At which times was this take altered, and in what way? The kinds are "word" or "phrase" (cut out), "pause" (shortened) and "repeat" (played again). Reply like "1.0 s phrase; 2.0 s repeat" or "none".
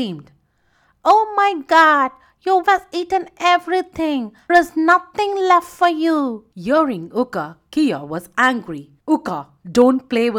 2.6 s word; 4.5 s word; 6.5 s pause; 9.0 s pause